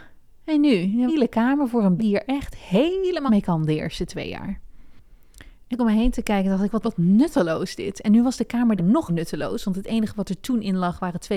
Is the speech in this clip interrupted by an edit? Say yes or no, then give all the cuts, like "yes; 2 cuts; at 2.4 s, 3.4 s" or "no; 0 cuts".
yes; 7 cuts; at 1.1 s, 2.0 s, 3.3 s, 5.7 s, 6.8 s, 8.8 s, 9.1 s